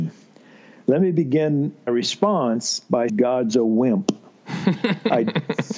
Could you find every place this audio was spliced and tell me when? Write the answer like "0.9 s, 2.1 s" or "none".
1.9 s, 3.1 s